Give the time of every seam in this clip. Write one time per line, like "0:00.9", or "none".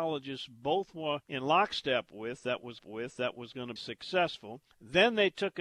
0:01.2
0:02.8
0:03.8
0:04.7